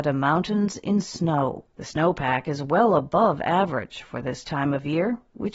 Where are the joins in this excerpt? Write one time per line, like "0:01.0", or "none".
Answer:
0:01.7